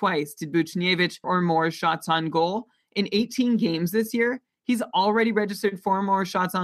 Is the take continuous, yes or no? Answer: no